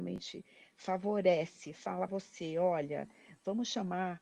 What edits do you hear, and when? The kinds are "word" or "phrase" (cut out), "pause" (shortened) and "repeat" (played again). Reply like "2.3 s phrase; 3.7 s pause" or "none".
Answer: 2.1 s word